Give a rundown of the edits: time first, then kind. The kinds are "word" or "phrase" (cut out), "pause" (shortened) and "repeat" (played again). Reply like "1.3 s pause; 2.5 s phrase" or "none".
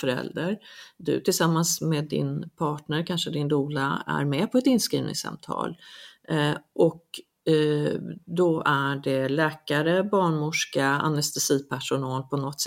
none